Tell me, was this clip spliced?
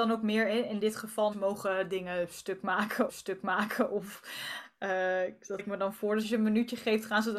yes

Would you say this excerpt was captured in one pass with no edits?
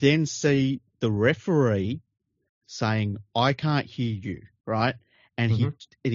yes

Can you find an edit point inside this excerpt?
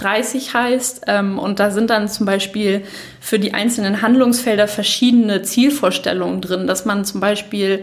no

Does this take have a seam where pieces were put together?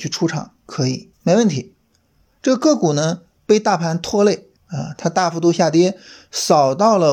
yes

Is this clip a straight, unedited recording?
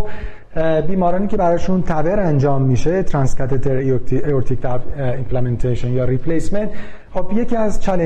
yes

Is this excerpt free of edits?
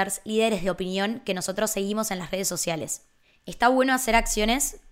yes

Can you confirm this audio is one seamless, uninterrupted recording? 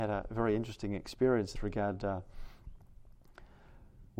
no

